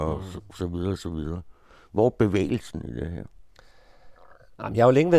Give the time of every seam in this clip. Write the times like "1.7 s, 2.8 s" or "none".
none